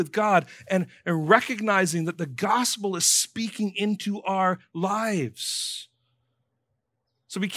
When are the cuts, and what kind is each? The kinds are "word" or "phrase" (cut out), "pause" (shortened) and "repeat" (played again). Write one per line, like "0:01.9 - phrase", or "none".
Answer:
none